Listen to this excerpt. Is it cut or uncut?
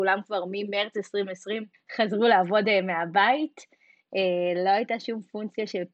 cut